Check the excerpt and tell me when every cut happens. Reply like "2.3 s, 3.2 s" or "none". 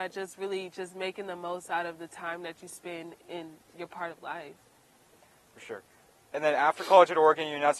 3.2 s